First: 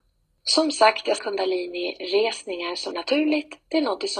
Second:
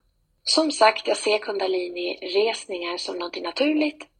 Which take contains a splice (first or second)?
first